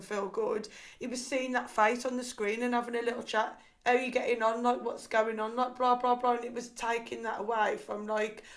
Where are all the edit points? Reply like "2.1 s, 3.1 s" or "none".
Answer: none